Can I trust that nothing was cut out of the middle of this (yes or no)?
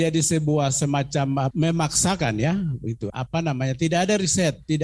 yes